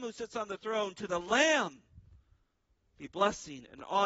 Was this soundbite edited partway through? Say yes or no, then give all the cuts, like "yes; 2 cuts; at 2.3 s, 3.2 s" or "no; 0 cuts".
no; 0 cuts